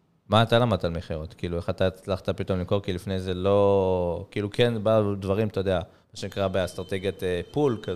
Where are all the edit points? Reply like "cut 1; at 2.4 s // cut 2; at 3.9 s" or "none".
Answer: none